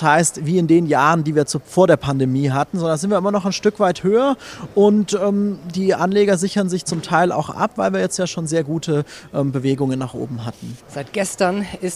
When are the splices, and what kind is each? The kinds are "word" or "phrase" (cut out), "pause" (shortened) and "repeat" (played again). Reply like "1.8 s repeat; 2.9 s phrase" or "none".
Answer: 10.8 s pause